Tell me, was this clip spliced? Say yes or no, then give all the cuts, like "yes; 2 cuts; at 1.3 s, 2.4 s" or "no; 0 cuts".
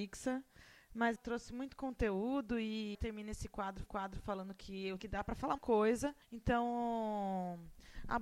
yes; 6 cuts; at 1.2 s, 2.9 s, 3.9 s, 5.0 s, 5.6 s, 6.2 s